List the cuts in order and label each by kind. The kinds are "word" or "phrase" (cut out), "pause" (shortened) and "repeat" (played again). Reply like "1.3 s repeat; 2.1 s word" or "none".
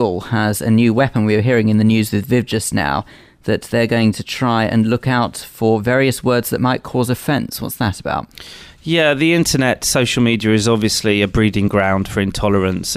none